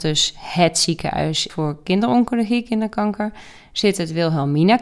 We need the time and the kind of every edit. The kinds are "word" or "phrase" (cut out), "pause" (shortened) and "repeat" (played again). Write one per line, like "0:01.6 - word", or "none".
0:01.5 - word